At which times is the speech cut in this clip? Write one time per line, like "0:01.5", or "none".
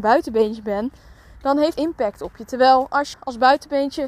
0:01.7
0:03.1